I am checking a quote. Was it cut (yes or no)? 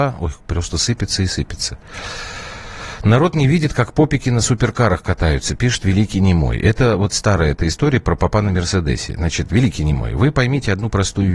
no